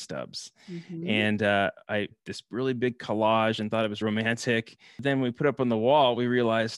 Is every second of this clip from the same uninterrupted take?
no; 2 cuts; at 2.1 s, 4.0 s

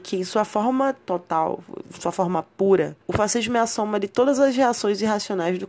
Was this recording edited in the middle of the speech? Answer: yes; 1 cut; at 3.0 s

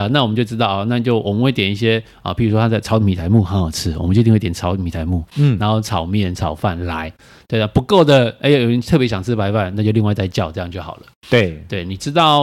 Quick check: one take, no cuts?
yes; 0 cuts

